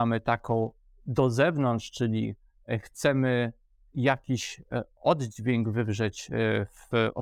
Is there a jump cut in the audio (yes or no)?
no